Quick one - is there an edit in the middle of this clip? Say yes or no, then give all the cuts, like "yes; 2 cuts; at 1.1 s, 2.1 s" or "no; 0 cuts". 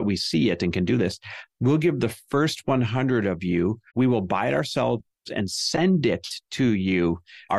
yes; 1 cut; at 3.9 s